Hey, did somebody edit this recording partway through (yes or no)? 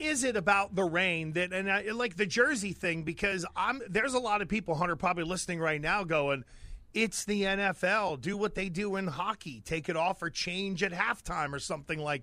no